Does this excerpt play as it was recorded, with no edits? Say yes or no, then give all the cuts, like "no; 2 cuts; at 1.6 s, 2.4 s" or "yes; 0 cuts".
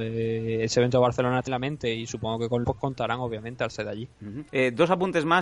no; 3 cuts; at 1.5 s, 2.6 s, 4.5 s